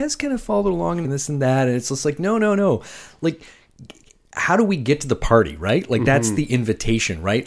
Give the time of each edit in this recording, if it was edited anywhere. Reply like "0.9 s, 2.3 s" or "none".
1.0 s